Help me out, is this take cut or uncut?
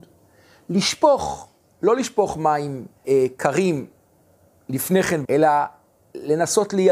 cut